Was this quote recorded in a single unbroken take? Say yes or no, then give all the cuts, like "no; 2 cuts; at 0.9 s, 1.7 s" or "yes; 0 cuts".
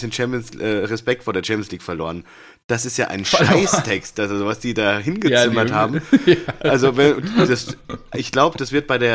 yes; 0 cuts